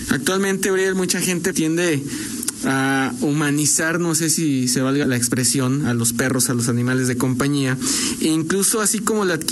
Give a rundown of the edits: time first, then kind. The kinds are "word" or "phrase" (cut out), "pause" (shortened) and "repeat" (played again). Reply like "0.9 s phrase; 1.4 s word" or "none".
1.5 s word; 5.0 s word; 5.8 s word